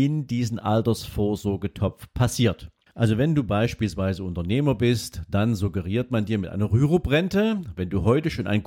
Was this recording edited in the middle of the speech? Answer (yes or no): yes